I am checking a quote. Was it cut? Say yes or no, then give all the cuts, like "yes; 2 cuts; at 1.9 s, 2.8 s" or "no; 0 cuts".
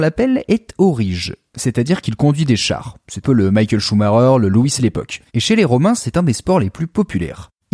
yes; 3 cuts; at 3.2 s, 4.8 s, 5.3 s